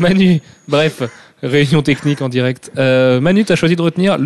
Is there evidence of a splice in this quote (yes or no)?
no